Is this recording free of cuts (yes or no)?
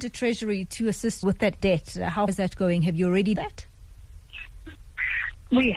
no